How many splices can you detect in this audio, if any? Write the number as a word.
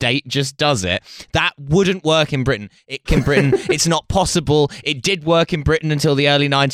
one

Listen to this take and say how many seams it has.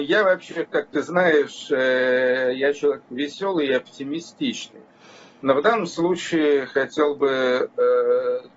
zero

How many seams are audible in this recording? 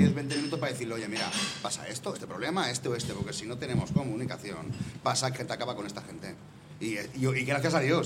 two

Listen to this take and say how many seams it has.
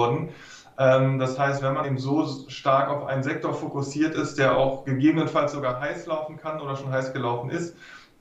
one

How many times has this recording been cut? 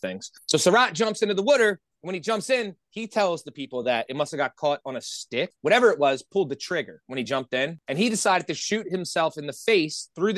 zero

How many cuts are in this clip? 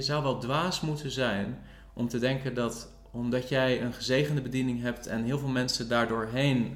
zero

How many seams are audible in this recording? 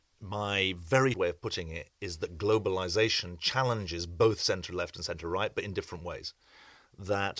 one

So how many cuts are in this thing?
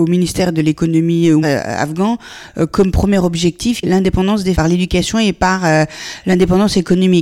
three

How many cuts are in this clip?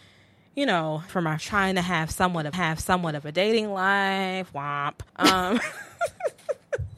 four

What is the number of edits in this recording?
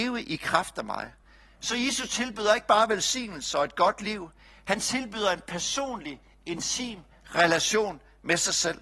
zero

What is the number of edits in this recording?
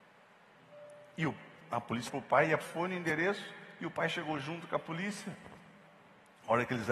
two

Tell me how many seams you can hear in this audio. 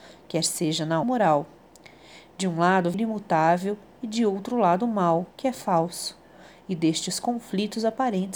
three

